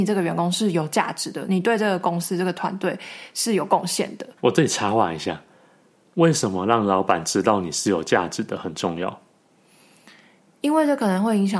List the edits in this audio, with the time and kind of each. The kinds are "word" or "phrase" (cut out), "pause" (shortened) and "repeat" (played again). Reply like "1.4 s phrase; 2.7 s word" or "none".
4.4 s pause